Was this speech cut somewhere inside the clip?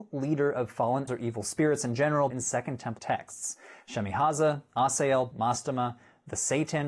yes; 4 cuts; at 1.1 s, 2.3 s, 3.0 s, 5.3 s

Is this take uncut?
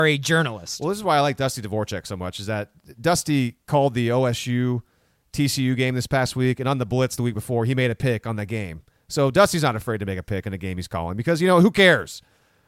yes; 0 cuts

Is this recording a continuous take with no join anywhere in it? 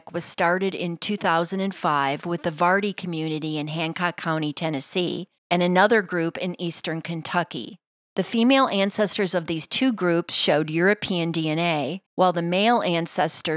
no; 3 cuts; at 5.4 s, 7.9 s, 12.1 s

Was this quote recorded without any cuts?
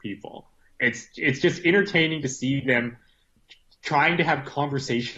yes; 0 cuts

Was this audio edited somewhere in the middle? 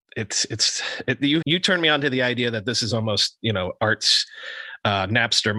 yes; 1 cut; at 1.4 s

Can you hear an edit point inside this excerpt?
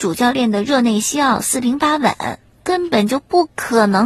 no; 0 cuts

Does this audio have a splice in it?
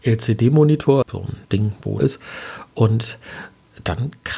yes; 3 cuts; at 1.0 s, 1.4 s, 2.0 s

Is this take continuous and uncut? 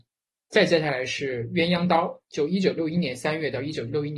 yes; 0 cuts

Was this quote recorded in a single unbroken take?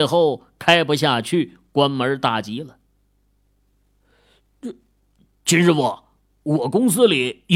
yes; 0 cuts

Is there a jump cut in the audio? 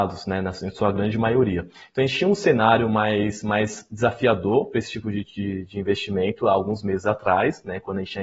no; 0 cuts

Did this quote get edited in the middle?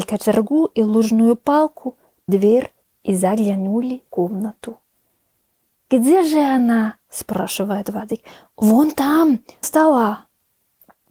yes; 4 cuts; at 2.3 s, 4.1 s, 7.0 s, 9.6 s

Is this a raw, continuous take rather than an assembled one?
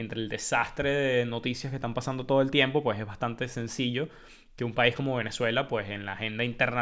yes; 0 cuts

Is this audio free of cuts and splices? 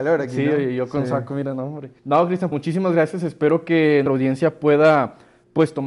no; 3 cuts; at 2.0 s, 2.5 s, 4.1 s

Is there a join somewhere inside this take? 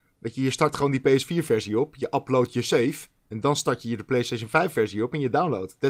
yes; 1 cut; at 3.2 s

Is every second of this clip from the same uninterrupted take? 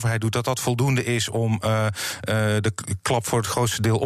yes; 0 cuts

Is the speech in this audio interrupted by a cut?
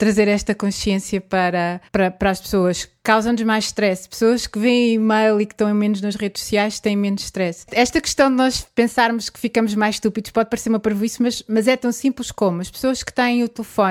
yes; 1 cut; at 1.9 s

